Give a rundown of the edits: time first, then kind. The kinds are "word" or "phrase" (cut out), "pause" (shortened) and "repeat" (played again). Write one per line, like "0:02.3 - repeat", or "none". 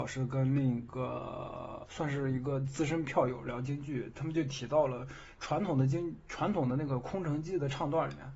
0:01.9 - word